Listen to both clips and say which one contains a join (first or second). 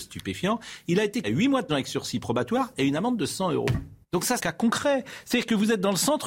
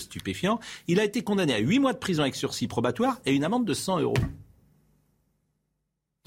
first